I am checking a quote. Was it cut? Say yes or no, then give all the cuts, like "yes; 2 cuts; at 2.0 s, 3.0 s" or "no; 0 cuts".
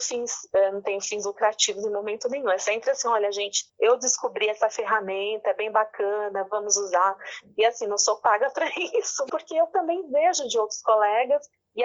yes; 2 cuts; at 3.7 s, 9.3 s